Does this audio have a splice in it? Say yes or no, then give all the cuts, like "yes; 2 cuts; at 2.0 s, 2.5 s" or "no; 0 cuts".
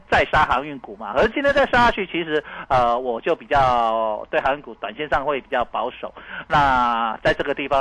yes; 1 cut; at 1.1 s